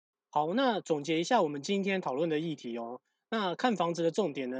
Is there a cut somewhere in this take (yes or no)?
no